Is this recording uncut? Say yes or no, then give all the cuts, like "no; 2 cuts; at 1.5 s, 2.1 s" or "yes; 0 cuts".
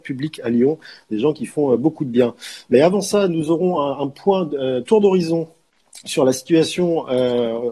yes; 0 cuts